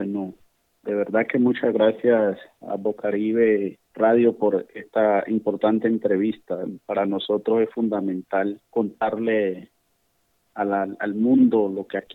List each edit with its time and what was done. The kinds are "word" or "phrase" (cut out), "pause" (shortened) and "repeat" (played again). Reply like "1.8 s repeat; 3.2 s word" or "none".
3.9 s pause; 8.6 s pause

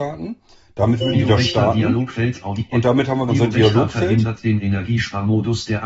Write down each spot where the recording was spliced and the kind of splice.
1.1 s word; 3.3 s word

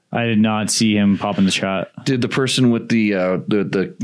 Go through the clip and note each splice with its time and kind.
1.4 s phrase

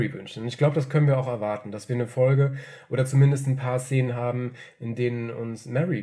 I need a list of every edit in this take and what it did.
none

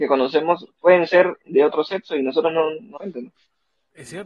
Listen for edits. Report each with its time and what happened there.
3.0 s word

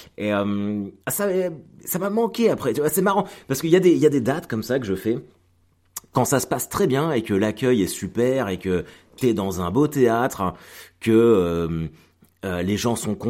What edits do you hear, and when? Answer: 1.0 s pause

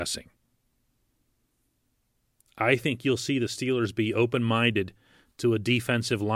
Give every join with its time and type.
none

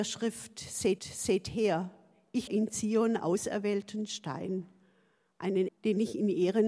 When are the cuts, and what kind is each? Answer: 1.0 s repeat; 2.5 s word; 3.2 s word; 5.7 s word

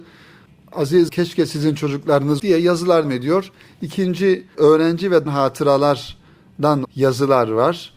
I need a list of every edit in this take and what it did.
1.1 s word; 2.4 s word; 3.0 s word; 4.5 s word; 5.3 s word; 6.8 s word

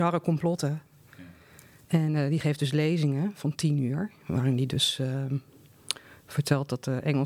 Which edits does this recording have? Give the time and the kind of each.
none

